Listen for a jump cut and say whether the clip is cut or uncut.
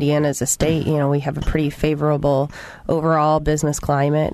uncut